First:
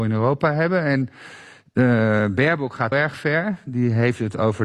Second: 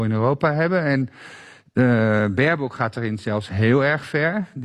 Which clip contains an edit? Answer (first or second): first